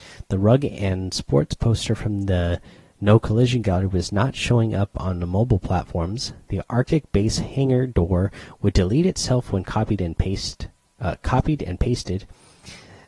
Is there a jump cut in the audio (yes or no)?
no